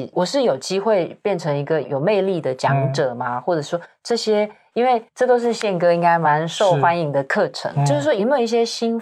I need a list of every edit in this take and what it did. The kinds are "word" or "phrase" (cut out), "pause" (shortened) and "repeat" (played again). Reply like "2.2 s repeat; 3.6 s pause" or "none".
5.1 s pause